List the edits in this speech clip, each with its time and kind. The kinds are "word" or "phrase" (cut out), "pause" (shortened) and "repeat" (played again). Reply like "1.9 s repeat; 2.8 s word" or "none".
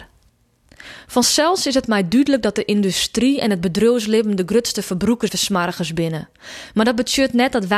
5.3 s word